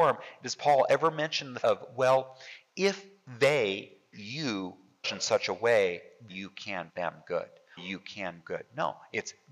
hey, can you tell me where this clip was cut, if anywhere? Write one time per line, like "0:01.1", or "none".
0:01.6
0:04.1
0:05.0
0:06.3
0:06.9
0:07.8
0:08.4